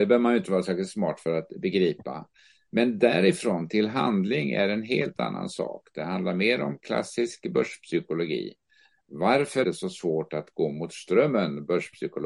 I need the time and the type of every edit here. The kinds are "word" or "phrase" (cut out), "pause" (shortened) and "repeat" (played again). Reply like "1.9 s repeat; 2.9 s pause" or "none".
9.6 s word